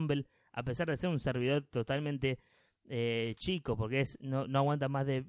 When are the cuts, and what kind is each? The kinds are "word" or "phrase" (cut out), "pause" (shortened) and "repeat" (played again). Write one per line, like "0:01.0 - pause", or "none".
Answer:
none